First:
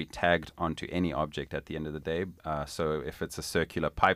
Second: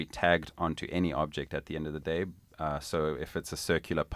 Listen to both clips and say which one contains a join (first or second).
first